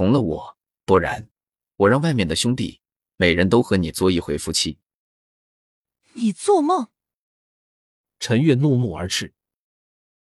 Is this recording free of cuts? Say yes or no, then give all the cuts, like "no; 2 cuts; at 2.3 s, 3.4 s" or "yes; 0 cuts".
yes; 0 cuts